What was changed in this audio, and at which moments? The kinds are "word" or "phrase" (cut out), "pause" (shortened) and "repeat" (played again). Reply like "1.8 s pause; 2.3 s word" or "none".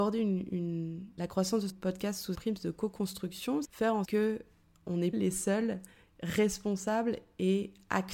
1.2 s word; 1.7 s word; 2.3 s word; 3.6 s word; 4.0 s word; 5.1 s word